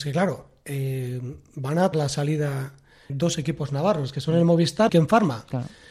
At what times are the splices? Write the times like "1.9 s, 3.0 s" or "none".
1.9 s, 3.1 s, 4.9 s